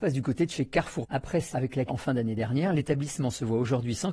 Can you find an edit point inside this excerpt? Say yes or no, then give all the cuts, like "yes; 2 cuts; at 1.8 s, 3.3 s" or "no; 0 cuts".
yes; 3 cuts; at 1.0 s, 1.5 s, 1.9 s